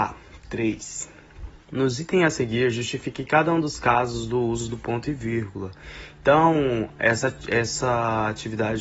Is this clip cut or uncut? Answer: cut